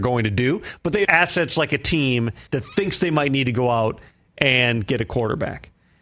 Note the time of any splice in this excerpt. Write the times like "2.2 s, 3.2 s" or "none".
1.0 s, 2.5 s